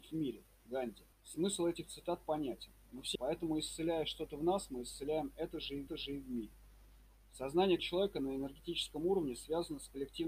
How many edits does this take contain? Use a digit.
4